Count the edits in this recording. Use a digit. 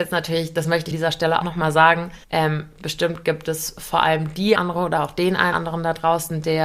5